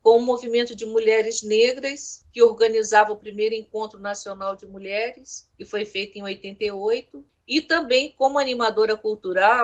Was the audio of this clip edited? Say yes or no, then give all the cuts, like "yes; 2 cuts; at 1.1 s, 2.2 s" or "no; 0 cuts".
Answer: yes; 1 cut; at 5.5 s